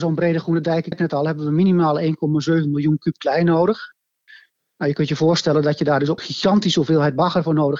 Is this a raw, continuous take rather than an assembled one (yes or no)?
no